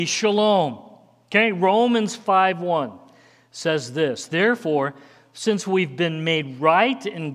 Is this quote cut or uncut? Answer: uncut